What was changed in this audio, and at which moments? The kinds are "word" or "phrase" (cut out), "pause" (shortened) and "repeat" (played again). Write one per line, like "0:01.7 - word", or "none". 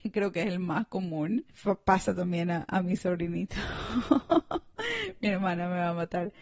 0:01.5 - pause